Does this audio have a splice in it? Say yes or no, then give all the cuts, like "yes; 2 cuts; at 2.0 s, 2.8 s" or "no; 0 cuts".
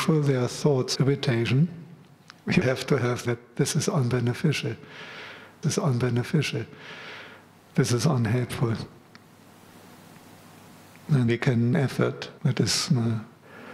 yes; 7 cuts; at 1.0 s, 2.6 s, 3.3 s, 5.6 s, 11.3 s, 11.7 s, 12.4 s